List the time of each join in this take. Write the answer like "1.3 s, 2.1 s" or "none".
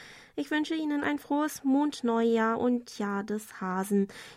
none